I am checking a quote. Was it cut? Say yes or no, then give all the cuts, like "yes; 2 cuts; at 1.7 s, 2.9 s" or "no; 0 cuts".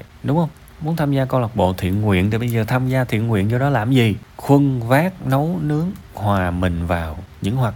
no; 0 cuts